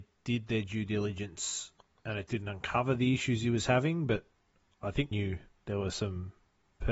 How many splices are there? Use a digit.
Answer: 2